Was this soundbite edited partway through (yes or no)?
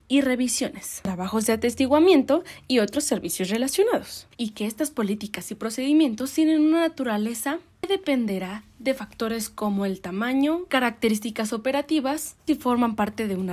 yes